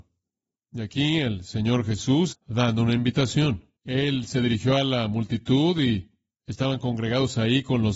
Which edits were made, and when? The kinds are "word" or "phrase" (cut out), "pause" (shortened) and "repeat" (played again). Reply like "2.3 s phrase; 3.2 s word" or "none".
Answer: 2.3 s word; 3.8 s pause